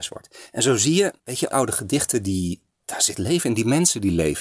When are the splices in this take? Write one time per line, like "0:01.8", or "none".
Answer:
0:01.2
0:01.5
0:03.2